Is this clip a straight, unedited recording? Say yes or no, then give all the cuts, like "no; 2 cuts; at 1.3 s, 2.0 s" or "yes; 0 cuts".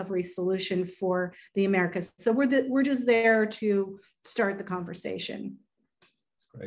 yes; 0 cuts